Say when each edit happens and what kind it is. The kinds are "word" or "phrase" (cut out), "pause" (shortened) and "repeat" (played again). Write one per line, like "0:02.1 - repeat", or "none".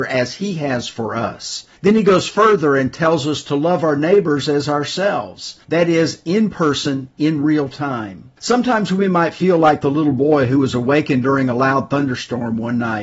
0:01.8 - pause
0:05.6 - pause
0:08.4 - pause